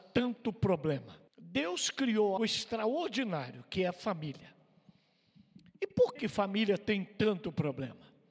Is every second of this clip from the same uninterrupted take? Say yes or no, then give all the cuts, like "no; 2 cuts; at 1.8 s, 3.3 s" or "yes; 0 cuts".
no; 3 cuts; at 1.3 s, 2.4 s, 6.2 s